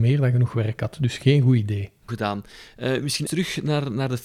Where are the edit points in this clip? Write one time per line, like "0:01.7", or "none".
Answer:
0:02.1
0:03.3